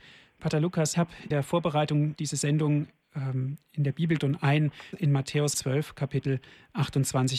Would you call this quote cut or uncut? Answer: cut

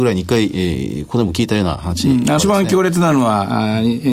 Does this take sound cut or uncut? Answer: cut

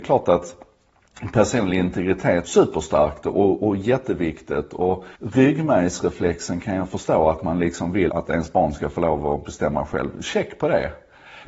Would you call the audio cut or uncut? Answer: cut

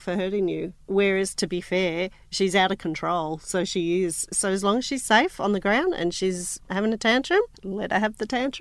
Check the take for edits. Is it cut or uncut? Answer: cut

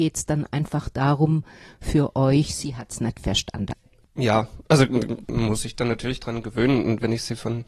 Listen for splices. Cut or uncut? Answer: uncut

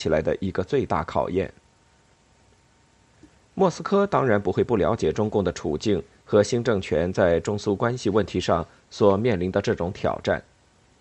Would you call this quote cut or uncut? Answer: uncut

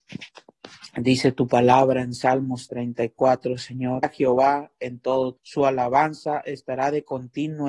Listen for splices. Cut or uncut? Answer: cut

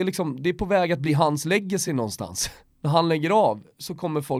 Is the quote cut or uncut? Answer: uncut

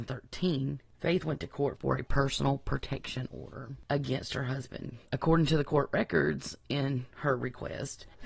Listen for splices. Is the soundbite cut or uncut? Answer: uncut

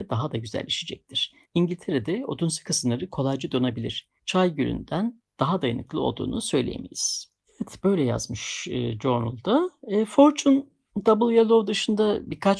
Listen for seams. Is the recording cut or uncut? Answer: cut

